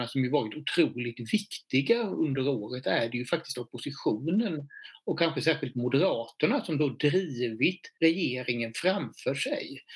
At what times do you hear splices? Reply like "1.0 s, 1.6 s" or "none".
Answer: 7.9 s